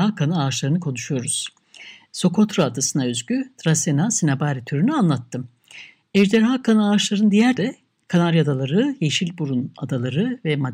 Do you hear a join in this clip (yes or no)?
yes